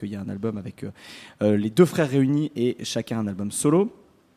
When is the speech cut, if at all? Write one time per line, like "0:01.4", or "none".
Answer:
none